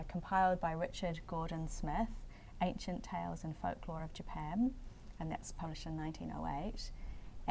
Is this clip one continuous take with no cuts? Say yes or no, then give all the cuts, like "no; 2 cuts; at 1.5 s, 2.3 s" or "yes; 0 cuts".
yes; 0 cuts